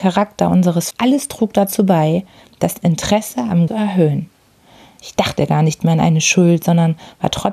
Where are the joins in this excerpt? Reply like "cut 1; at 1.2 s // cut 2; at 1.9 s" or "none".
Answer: cut 1; at 0.9 s // cut 2; at 3.7 s